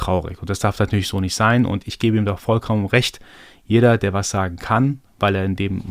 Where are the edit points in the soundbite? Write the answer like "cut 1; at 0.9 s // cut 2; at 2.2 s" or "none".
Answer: none

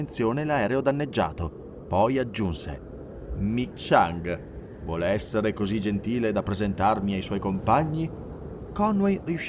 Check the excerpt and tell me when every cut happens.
cut 1; at 3.7 s

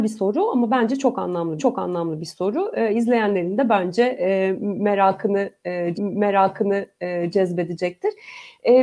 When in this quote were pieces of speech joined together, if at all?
cut 1; at 1.6 s // cut 2; at 5.9 s

